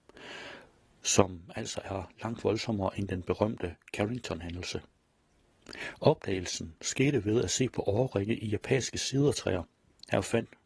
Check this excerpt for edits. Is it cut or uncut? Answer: uncut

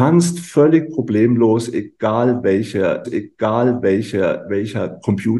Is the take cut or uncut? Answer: cut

